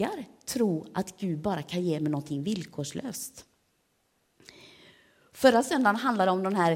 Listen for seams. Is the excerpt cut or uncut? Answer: uncut